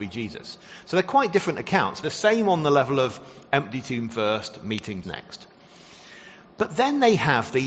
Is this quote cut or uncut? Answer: cut